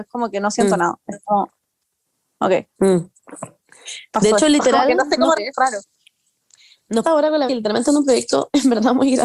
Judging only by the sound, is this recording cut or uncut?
cut